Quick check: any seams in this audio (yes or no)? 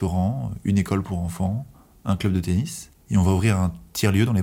yes